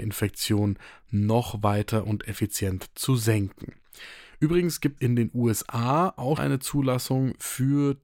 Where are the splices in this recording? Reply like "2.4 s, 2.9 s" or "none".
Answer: 5.0 s, 6.4 s